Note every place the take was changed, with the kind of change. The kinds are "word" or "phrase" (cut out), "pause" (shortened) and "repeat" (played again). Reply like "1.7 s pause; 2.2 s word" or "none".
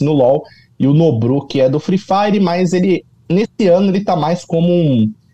none